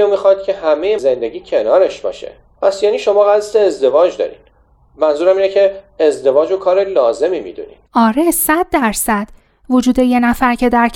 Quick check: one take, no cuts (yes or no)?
no